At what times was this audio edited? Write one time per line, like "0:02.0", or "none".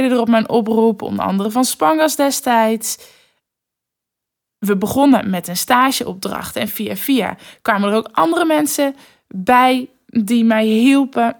none